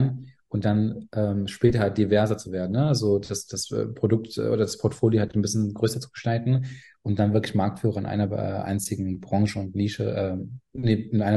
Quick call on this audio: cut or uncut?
uncut